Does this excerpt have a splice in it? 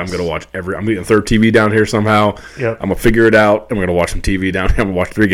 no; 0 cuts

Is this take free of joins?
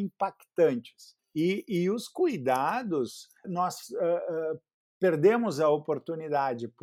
no; 2 cuts; at 1.2 s, 3.4 s

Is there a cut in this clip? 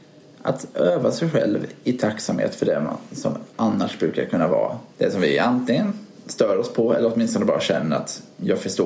yes; 2 cuts; at 3.5 s, 4.9 s

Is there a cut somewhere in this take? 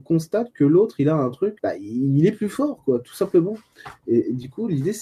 yes; 1 cut; at 1.6 s

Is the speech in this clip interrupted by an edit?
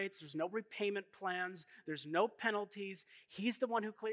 no; 0 cuts

